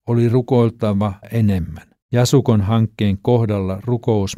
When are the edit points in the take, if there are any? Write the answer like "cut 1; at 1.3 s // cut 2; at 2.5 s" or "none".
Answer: cut 1; at 1.2 s // cut 2; at 2.0 s